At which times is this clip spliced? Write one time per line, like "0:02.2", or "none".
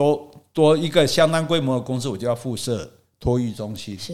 none

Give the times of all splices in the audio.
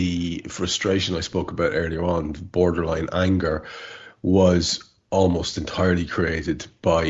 none

